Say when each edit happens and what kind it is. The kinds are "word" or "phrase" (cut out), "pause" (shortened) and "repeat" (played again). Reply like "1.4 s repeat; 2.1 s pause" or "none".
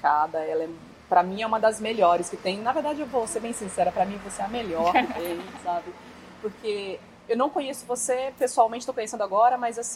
none